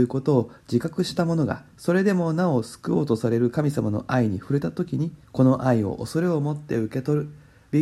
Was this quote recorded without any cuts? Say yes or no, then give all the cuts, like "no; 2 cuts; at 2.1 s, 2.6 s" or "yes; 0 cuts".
no; 2 cuts; at 1.7 s, 5.2 s